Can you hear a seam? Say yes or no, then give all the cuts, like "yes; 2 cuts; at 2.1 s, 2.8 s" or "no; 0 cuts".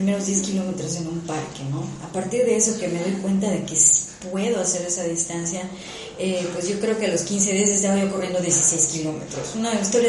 no; 0 cuts